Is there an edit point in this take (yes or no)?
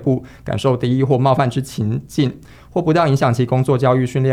no